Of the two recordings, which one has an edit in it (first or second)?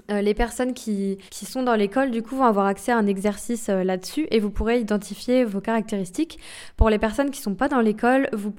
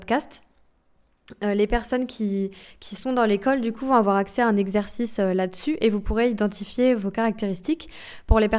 first